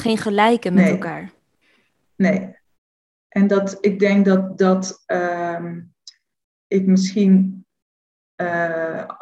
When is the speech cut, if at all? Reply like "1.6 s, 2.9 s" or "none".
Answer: none